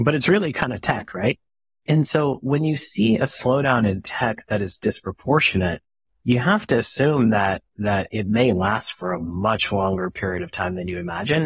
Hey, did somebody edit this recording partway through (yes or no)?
no